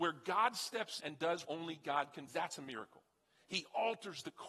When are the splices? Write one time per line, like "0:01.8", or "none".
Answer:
0:01.0
0:01.4
0:02.3